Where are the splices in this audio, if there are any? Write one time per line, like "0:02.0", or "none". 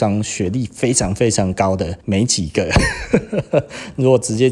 0:02.0